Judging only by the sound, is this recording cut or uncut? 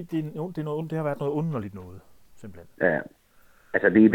uncut